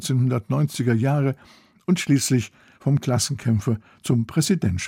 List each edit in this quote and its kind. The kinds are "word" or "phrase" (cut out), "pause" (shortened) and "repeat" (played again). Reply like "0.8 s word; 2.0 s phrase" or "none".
none